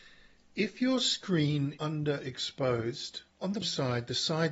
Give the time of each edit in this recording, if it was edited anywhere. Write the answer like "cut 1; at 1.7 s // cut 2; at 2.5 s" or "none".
cut 1; at 1.8 s // cut 2; at 3.3 s // cut 3; at 3.6 s